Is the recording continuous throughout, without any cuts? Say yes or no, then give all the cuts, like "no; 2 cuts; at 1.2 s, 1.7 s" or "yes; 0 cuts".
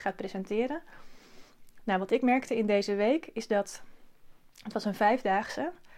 yes; 0 cuts